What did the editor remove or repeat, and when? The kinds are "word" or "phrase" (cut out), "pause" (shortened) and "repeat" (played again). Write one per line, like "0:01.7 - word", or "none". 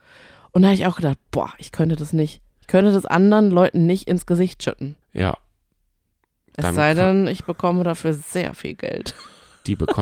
0:02.5 - pause
0:05.0 - pause